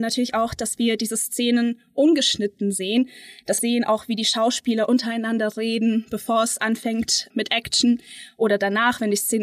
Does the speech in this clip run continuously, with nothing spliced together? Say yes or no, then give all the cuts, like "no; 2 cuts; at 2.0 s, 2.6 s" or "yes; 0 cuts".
no; 2 cuts; at 3.6 s, 7.3 s